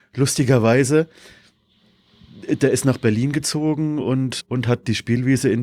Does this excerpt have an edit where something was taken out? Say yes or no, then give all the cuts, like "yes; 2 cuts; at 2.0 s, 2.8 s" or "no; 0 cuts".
no; 0 cuts